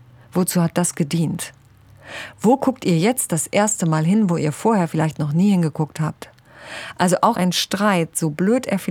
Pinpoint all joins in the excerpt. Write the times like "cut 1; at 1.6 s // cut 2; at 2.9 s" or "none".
cut 1; at 7.3 s